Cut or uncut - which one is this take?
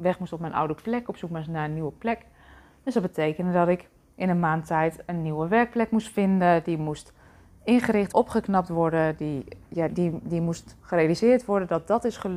cut